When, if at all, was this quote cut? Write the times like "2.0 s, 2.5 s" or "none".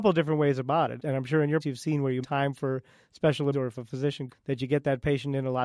1.0 s, 1.6 s, 2.2 s, 3.5 s, 4.3 s